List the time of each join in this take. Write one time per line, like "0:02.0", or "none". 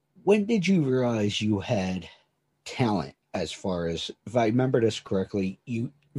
0:03.2
0:04.2